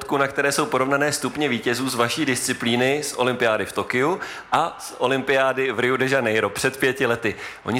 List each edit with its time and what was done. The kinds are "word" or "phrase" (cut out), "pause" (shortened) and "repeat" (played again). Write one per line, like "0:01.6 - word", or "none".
none